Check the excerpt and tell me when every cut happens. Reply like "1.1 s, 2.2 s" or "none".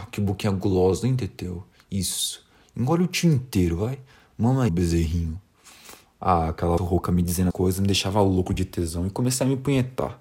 4.7 s, 6.8 s, 7.5 s